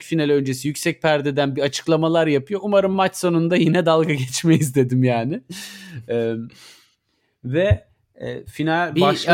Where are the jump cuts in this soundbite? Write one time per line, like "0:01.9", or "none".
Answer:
none